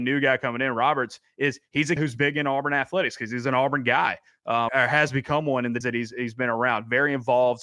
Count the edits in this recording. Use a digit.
3